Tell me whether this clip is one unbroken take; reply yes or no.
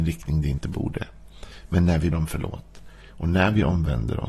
no